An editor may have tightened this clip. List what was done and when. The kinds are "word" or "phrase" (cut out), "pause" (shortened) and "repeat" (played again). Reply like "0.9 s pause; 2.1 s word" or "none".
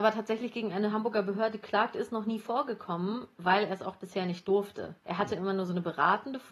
5.0 s pause